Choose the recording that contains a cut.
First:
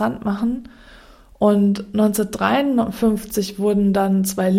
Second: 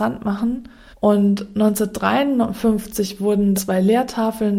second; 2 cuts; at 0.9 s, 3.5 s

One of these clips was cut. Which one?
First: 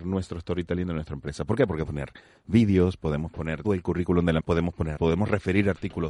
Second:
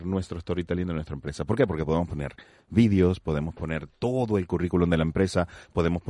first; 4 cuts; at 1.8 s, 3.6 s, 4.4 s, 5.0 s

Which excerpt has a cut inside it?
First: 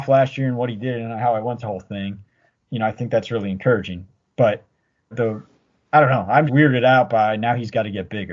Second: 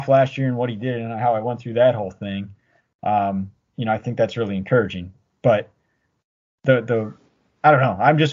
first; 4 cuts; at 1.6 s, 2.5 s, 5.1 s, 6.5 s

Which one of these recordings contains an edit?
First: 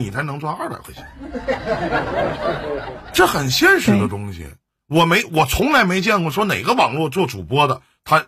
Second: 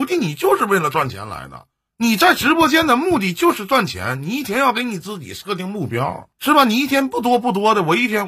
second; 2 cuts; at 1.7 s, 6.3 s

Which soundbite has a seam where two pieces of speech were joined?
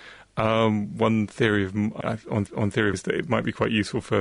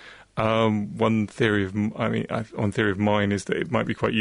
first; 3 cuts; at 2.0 s, 2.5 s, 2.9 s

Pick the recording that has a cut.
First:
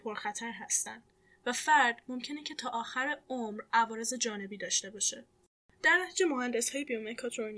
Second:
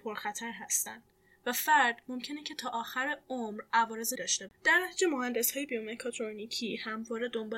second; 2 cuts; at 4.2 s, 4.5 s

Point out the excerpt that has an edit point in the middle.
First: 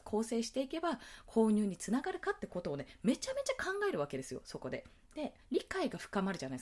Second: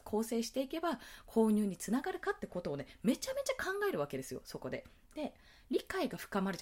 first; 1 cut; at 5.4 s

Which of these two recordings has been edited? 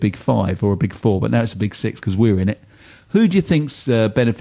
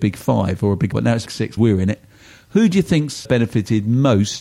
second; 4 cuts; at 0.9 s, 1.3 s, 1.6 s, 3.2 s

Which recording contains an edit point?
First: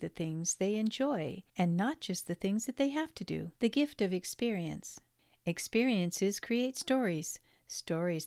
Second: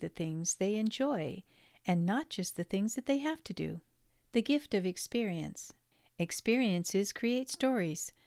first; 2 cuts; at 1.5 s, 3.6 s

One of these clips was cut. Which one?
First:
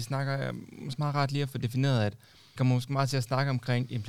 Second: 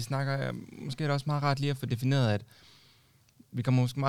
first; 2 cuts; at 1.0 s, 2.6 s

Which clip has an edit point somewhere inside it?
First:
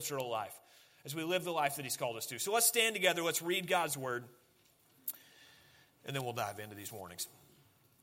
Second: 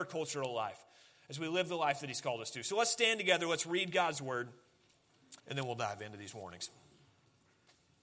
second; 1 cut; at 5.4 s

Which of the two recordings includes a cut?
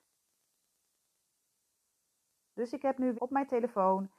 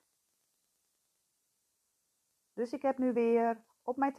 first; 1 cut; at 3.1 s

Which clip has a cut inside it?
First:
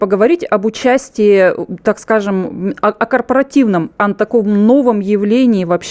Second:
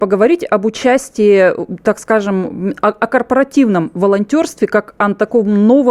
first; 1 cut; at 3.9 s

